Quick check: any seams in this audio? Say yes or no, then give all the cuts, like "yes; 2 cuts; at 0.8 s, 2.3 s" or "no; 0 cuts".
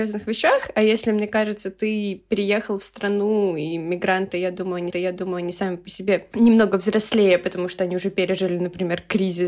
yes; 1 cut; at 4.9 s